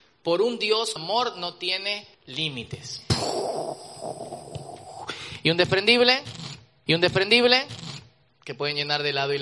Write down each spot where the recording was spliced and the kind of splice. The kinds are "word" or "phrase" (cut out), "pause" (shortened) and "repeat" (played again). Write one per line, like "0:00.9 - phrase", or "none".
0:01.0 - word
0:02.1 - pause
0:06.9 - repeat